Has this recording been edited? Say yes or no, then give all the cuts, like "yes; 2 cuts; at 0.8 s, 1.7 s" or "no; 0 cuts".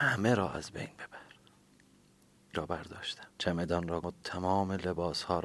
yes; 3 cuts; at 2.5 s, 3.3 s, 4.0 s